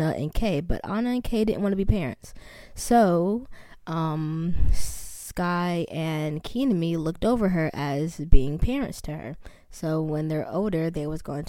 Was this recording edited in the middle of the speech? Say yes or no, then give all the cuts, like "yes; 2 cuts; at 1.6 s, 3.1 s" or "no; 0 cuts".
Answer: no; 0 cuts